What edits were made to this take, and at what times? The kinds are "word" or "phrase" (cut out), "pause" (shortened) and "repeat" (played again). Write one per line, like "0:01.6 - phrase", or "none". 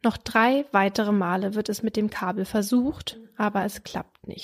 none